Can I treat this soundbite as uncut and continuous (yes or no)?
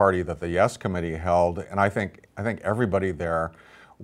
yes